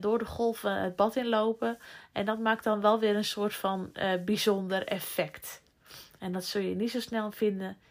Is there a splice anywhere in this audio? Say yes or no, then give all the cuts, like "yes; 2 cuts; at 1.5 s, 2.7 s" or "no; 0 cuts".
no; 0 cuts